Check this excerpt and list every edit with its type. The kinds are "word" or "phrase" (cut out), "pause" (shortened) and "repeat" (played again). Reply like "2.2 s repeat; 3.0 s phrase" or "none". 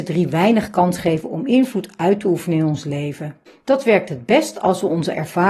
3.5 s pause